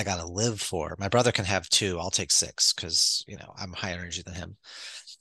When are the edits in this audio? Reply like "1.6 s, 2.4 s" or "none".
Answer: none